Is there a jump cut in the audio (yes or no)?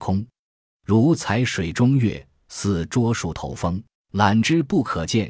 yes